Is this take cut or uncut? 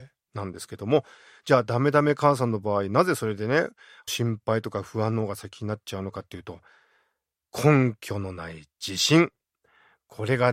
uncut